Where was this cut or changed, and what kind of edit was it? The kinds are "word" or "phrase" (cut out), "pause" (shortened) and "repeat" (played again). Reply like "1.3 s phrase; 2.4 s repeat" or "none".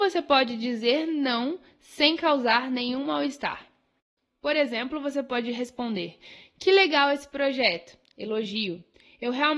none